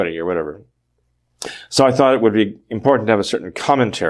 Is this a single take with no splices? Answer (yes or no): yes